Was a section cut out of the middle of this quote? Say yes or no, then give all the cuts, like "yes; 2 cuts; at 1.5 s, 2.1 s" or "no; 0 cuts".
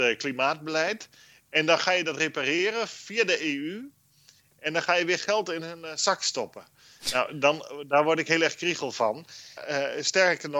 no; 0 cuts